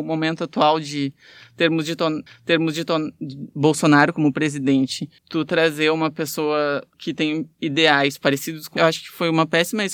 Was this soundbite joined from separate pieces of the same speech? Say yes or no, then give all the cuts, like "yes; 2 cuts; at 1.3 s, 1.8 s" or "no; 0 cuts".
yes; 4 cuts; at 2.3 s, 5.2 s, 6.9 s, 8.8 s